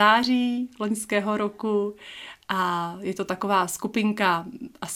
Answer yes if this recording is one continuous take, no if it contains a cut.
yes